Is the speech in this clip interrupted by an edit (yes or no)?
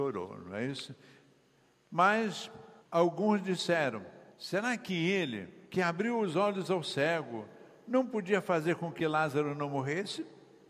yes